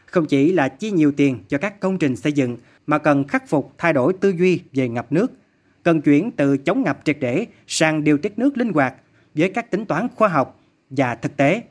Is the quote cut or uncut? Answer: uncut